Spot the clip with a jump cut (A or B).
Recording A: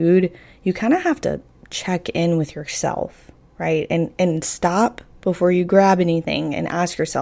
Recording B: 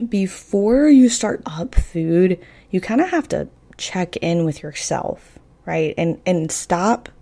B